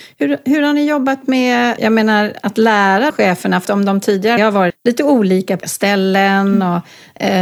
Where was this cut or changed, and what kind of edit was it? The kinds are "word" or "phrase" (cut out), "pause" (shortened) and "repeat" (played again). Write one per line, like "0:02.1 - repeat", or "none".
0:01.8 - word
0:03.1 - word
0:03.6 - word
0:04.4 - word
0:04.7 - word
0:05.6 - word